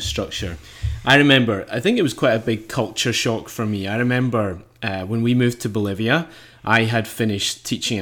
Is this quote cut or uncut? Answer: uncut